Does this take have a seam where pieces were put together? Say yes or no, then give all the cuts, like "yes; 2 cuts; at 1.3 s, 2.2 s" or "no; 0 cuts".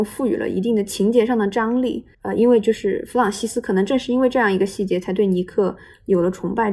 yes; 1 cut; at 2.1 s